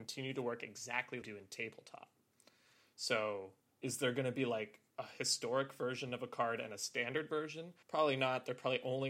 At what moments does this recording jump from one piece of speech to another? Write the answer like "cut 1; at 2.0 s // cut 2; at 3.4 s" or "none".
cut 1; at 1.2 s // cut 2; at 3.7 s // cut 3; at 4.9 s // cut 4; at 7.8 s